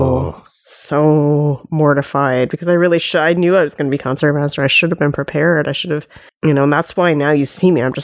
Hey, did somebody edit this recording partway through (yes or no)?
yes